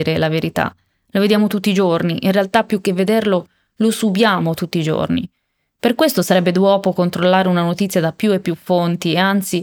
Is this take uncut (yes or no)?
yes